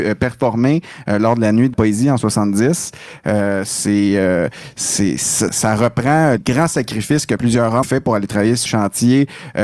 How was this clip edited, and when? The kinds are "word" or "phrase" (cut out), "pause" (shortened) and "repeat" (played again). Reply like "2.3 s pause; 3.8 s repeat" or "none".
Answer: 1.7 s word; 5.5 s word; 6.4 s word; 7.4 s word; 7.8 s word; 8.7 s word

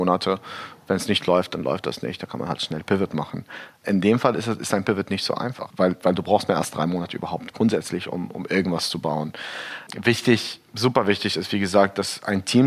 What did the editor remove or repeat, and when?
none

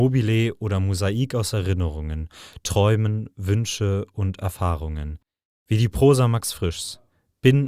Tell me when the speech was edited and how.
none

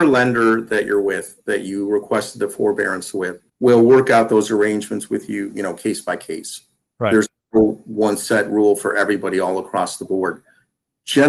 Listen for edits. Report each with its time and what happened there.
3.5 s pause

